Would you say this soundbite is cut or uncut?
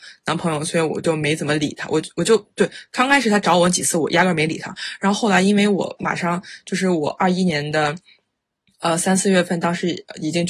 uncut